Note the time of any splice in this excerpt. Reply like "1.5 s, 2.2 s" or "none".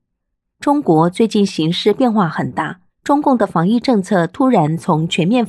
2.9 s